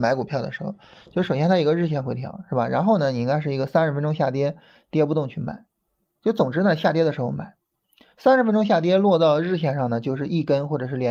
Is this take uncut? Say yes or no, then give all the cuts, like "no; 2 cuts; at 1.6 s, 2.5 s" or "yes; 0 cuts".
yes; 0 cuts